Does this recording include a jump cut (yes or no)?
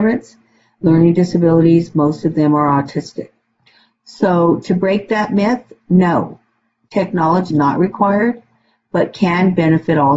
yes